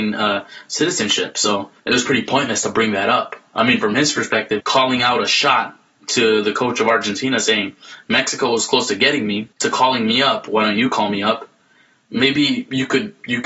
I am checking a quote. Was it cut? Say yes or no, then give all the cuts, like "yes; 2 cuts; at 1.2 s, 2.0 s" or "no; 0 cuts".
yes; 3 cuts; at 1.8 s, 4.6 s, 9.5 s